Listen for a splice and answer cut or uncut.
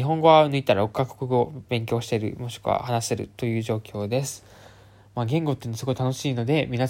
cut